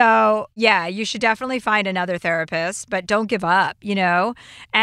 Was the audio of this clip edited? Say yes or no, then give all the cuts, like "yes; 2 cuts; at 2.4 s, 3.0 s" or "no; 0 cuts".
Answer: no; 0 cuts